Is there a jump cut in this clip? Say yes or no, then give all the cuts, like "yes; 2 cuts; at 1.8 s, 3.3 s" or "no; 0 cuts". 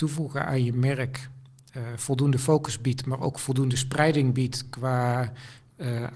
no; 0 cuts